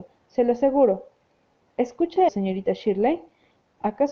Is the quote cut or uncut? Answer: cut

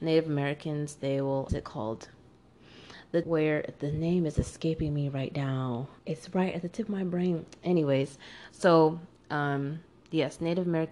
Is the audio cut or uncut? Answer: cut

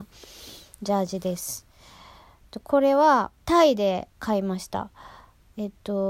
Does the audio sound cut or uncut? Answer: cut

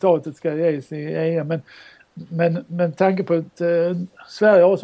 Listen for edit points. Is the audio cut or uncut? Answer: uncut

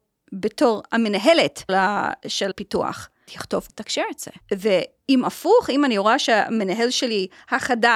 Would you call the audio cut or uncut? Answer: cut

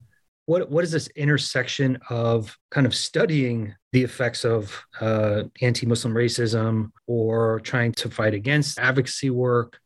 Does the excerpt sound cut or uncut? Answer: cut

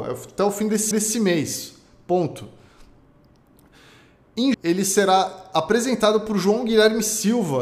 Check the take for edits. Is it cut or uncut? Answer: cut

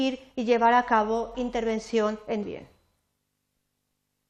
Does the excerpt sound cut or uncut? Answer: cut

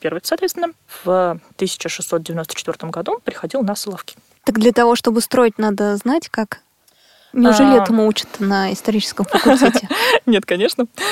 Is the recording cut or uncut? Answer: uncut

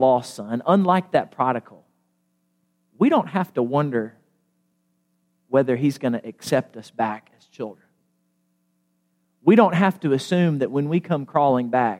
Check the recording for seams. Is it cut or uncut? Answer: uncut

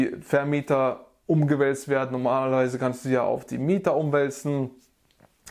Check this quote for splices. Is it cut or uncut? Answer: uncut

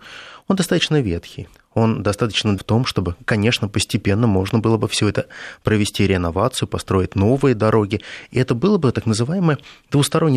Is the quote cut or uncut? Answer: cut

